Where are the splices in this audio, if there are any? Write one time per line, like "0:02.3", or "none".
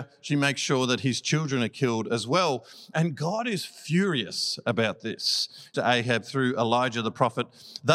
0:05.7